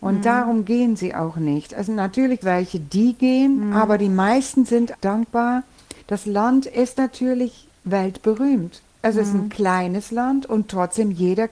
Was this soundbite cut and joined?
yes; 3 cuts; at 2.4 s, 4.9 s, 6.0 s

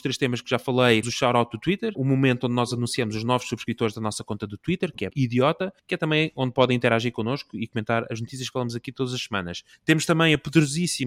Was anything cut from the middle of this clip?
yes; 4 cuts; at 1.0 s, 1.9 s, 5.1 s, 5.8 s

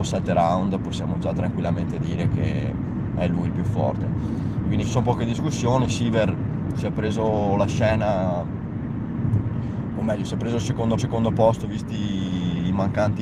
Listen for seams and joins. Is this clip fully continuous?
no; 2 cuts; at 4.8 s, 11.0 s

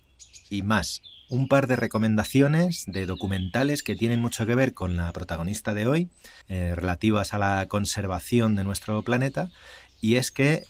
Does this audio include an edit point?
yes; 1 cut; at 6.4 s

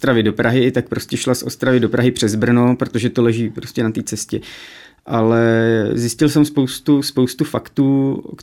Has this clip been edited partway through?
no; 0 cuts

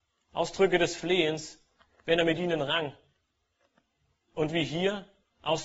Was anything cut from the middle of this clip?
no; 0 cuts

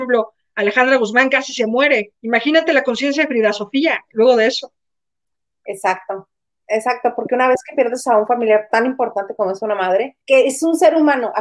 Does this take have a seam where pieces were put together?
yes; 3 cuts; at 2.2 s, 6.5 s, 10.2 s

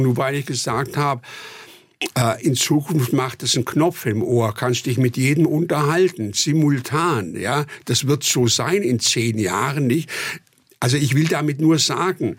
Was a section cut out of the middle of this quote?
no; 0 cuts

